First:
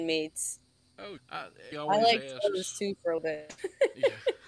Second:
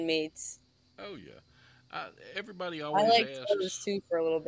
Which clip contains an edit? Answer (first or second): first